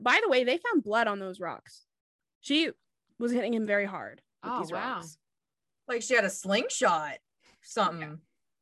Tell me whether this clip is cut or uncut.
uncut